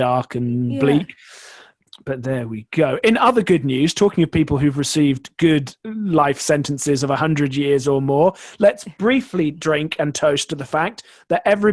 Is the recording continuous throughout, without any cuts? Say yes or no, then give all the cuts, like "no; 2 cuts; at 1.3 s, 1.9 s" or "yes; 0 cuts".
no; 1 cut; at 5.8 s